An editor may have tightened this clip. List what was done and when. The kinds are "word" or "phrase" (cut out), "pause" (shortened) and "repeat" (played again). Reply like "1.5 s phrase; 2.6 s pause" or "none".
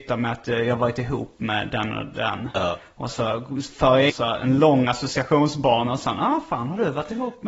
3.1 s word; 4.1 s phrase